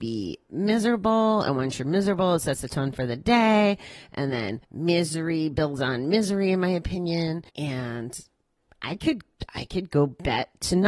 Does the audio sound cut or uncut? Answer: cut